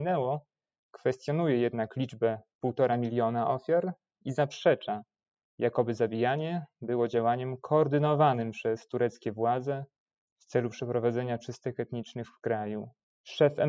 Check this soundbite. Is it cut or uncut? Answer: uncut